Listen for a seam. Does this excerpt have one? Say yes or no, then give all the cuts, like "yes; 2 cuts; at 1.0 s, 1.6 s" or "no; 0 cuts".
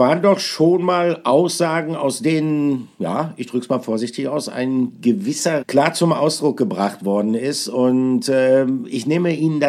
yes; 1 cut; at 5.6 s